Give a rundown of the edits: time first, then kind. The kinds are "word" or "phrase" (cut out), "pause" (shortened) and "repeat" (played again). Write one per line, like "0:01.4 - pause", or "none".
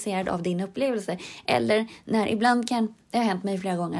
0:03.0 - pause